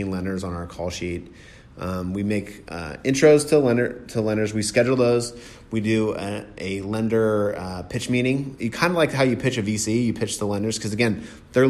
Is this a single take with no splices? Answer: yes; 0 cuts

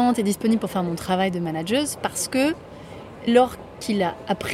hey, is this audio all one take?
no; 1 cut; at 3.3 s

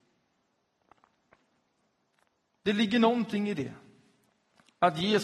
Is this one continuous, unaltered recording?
yes; 0 cuts

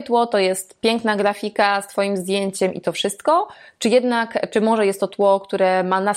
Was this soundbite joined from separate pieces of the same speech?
no; 0 cuts

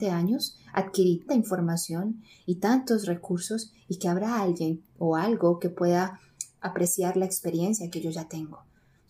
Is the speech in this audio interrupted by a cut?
yes; 1 cut; at 1.3 s

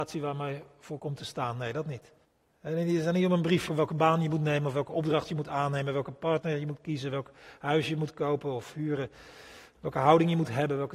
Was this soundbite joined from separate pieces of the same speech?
yes; 2 cuts; at 2.2 s, 3.7 s

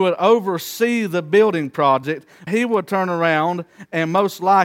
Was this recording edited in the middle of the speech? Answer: yes; 1 cut; at 2.5 s

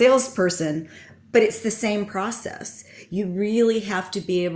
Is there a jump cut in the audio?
no; 0 cuts

